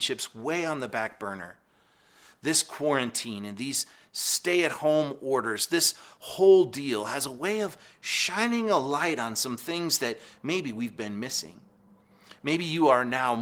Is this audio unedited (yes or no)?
yes